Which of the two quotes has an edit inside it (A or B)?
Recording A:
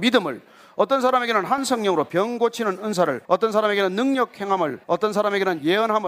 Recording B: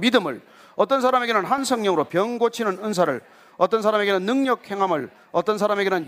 A